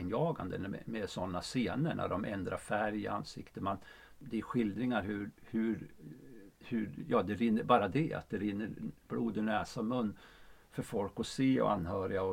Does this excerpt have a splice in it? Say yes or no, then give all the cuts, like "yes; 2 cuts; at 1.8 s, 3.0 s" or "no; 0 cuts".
no; 0 cuts